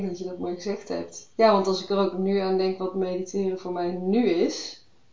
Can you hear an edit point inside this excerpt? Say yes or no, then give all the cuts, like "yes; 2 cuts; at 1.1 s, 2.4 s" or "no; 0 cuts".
yes; 1 cut; at 1.3 s